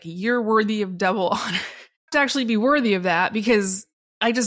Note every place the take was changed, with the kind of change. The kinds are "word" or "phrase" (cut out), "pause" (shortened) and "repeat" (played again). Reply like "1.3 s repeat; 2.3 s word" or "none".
2.1 s phrase